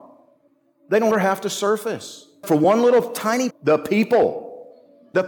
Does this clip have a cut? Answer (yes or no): yes